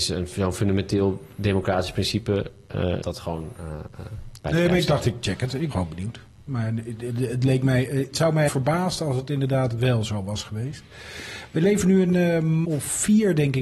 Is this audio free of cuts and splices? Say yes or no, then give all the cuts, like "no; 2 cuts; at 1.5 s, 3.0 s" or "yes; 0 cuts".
no; 6 cuts; at 3.0 s, 4.4 s, 5.7 s, 8.1 s, 8.5 s, 12.6 s